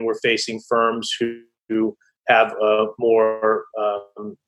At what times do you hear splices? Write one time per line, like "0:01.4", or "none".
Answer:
none